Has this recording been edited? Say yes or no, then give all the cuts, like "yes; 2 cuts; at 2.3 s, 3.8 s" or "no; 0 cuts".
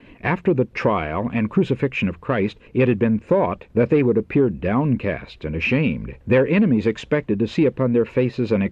yes; 3 cuts; at 2.7 s, 3.7 s, 6.2 s